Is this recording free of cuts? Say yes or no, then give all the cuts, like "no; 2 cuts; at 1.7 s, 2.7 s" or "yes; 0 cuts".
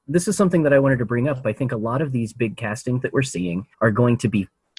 no; 2 cuts; at 3.0 s, 3.7 s